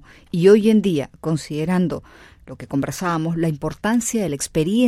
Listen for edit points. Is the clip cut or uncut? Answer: uncut